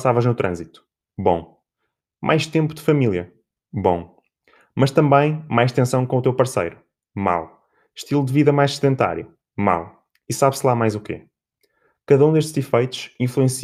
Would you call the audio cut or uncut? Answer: uncut